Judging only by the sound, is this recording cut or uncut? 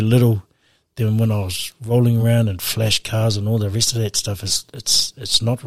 uncut